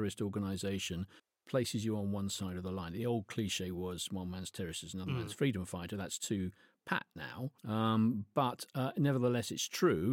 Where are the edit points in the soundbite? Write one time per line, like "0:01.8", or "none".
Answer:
0:01.2
0:07.6